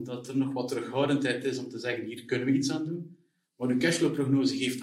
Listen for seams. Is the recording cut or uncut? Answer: uncut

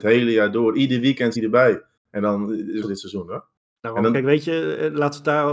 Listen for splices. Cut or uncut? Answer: cut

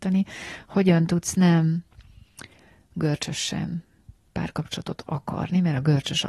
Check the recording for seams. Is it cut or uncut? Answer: uncut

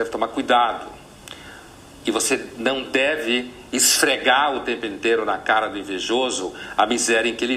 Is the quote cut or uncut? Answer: uncut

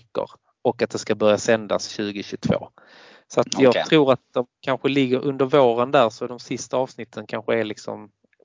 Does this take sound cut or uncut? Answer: uncut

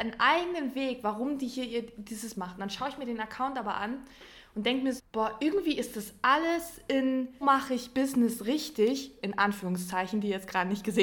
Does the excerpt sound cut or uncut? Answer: cut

